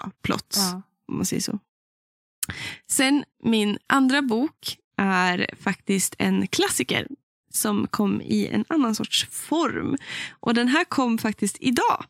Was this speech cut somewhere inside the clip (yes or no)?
no